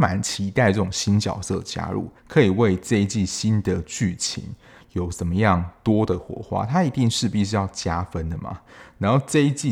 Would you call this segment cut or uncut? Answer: cut